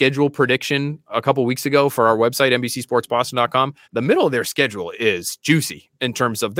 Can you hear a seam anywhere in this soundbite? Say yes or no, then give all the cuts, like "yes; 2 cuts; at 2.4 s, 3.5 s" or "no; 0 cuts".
yes; 1 cut; at 3.8 s